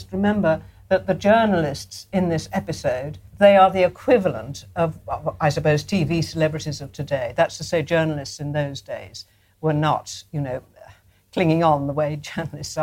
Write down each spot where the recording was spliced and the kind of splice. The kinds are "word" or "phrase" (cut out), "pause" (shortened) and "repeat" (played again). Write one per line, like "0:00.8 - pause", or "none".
none